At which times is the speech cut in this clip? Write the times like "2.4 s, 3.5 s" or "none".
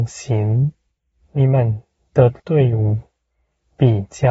1.0 s, 2.4 s